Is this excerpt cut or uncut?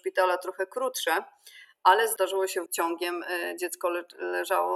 cut